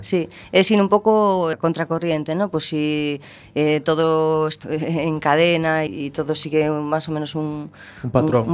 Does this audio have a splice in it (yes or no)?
yes